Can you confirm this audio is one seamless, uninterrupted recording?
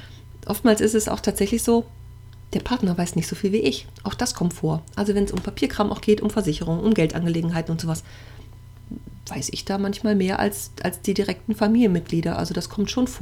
yes; 0 cuts

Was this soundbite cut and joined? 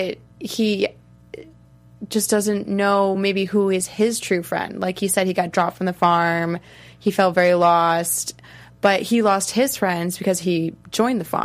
no; 0 cuts

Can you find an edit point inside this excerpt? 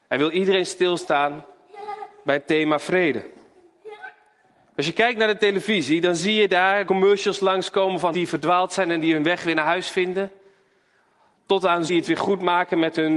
yes; 3 cuts; at 6.8 s, 8.1 s, 11.9 s

